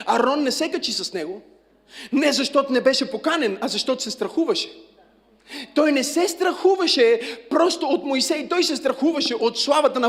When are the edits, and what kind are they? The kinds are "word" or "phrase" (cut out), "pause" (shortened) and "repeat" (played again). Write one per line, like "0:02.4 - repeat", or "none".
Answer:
none